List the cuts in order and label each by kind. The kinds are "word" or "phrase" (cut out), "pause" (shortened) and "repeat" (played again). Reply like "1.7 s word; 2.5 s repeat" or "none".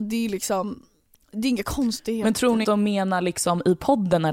2.6 s word